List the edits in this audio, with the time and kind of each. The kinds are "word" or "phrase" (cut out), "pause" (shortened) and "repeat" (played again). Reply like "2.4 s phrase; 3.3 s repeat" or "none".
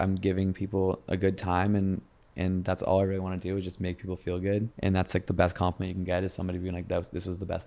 4.7 s pause